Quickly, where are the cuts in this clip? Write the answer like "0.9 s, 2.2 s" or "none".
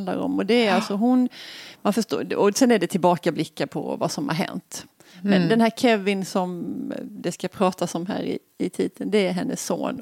none

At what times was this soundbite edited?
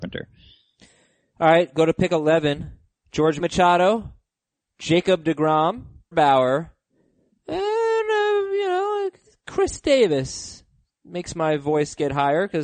3.4 s, 6.1 s

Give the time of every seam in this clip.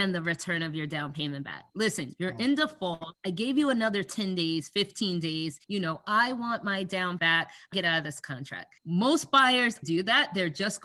1.7 s, 3.2 s, 5.6 s, 7.2 s, 7.7 s, 8.8 s, 9.8 s

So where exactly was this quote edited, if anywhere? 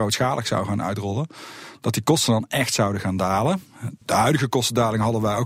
4.0 s

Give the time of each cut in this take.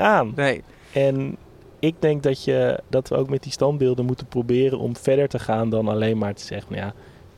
2.9 s

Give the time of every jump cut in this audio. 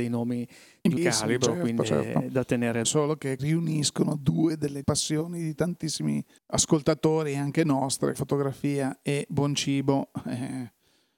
1.0 s, 1.8 s, 2.8 s, 3.4 s, 4.8 s, 6.4 s, 8.1 s

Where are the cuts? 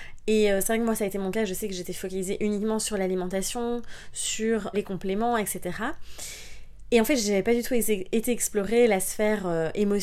4.7 s

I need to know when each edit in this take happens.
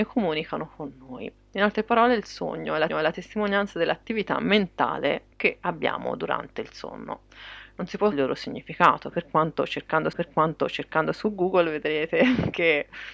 2.9 s, 5.3 s, 8.1 s, 10.1 s

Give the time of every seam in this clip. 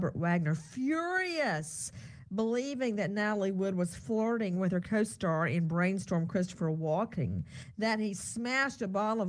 none

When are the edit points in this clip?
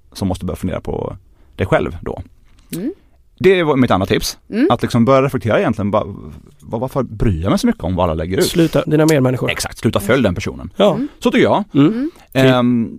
8.8 s

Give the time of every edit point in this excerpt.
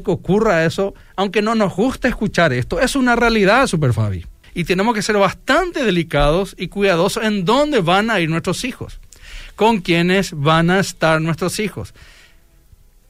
4.4 s

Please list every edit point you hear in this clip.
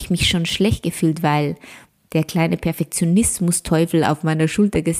none

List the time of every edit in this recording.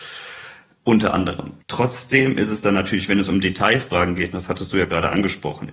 1.6 s

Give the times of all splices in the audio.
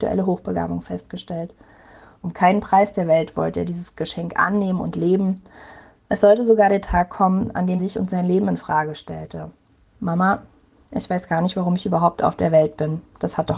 7.8 s

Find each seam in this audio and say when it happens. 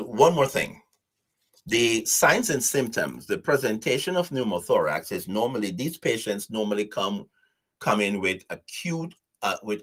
none

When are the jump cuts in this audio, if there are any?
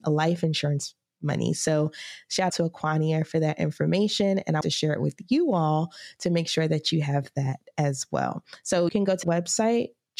2.5 s, 4.6 s, 8.9 s, 9.2 s

